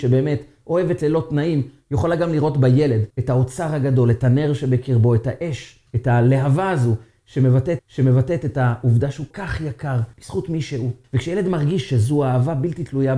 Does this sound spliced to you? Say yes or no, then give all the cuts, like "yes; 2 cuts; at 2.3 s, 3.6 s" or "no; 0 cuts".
yes; 6 cuts; at 3.1 s, 5.9 s, 7.8 s, 9.3 s, 10.1 s, 11.0 s